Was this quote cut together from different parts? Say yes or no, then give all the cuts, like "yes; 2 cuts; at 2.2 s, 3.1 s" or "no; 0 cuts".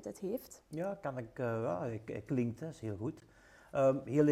no; 0 cuts